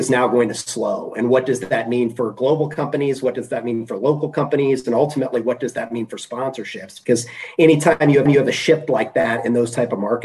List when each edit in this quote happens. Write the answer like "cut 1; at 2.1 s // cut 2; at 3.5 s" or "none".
cut 1; at 8.3 s

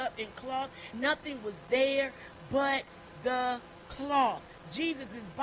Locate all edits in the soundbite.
cut 1; at 0.9 s

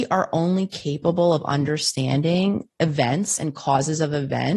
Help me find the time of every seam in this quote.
none

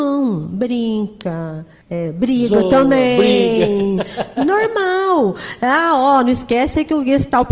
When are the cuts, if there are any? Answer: cut 1; at 1.8 s

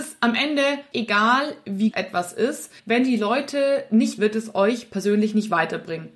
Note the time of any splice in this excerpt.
cut 1; at 0.9 s // cut 2; at 1.9 s // cut 3; at 2.8 s // cut 4; at 4.2 s

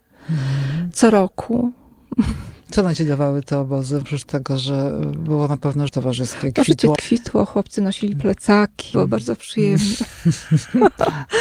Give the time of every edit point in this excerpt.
cut 1; at 4.0 s // cut 2; at 5.9 s // cut 3; at 7.0 s // cut 4; at 8.9 s

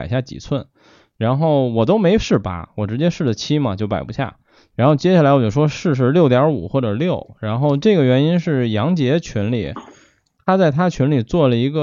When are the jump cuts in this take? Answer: none

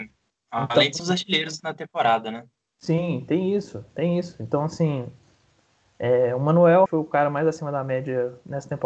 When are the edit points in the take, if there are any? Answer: cut 1; at 1.0 s // cut 2; at 6.9 s

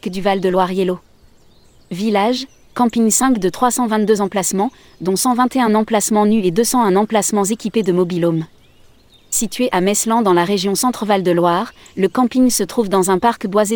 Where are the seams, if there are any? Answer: none

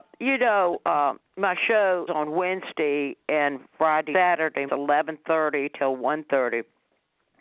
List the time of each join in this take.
cut 1; at 1.2 s // cut 2; at 2.1 s // cut 3; at 4.1 s // cut 4; at 4.7 s

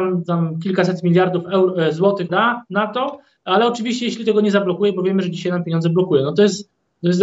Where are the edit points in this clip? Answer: cut 1; at 2.3 s

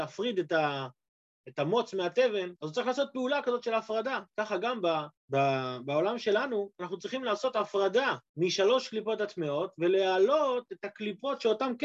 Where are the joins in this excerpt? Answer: cut 1; at 2.6 s // cut 2; at 4.3 s // cut 3; at 5.2 s // cut 4; at 8.3 s

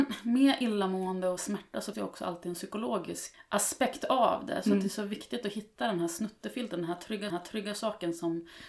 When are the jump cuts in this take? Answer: cut 1; at 1.4 s // cut 2; at 1.9 s // cut 3; at 7.3 s

